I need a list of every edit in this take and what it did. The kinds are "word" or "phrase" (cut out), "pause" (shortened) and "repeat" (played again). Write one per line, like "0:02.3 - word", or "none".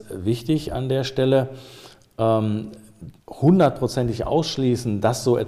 0:03.2 - pause